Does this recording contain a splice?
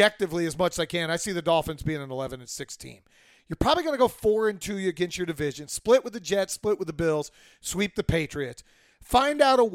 no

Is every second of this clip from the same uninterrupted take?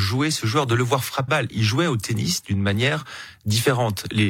no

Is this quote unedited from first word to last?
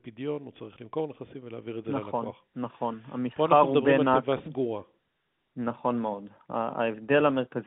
yes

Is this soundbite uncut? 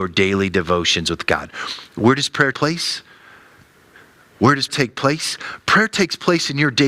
no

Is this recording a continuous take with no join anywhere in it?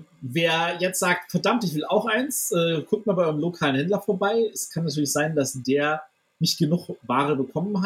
yes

